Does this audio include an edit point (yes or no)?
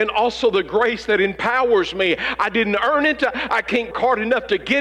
yes